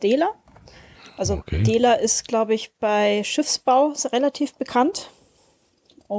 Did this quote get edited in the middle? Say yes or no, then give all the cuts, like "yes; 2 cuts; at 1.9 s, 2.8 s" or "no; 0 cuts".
no; 0 cuts